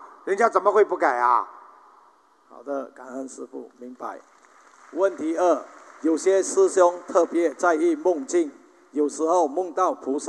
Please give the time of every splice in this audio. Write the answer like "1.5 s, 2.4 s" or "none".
none